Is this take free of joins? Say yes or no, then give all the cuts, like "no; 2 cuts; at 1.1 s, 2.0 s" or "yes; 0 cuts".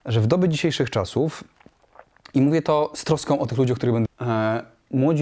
no; 1 cut; at 4.1 s